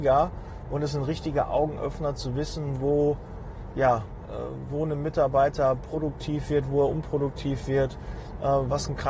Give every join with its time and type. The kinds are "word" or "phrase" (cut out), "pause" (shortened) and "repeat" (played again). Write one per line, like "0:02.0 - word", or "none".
none